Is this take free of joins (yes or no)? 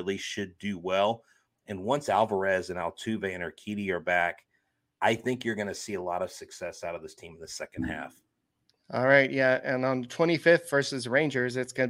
yes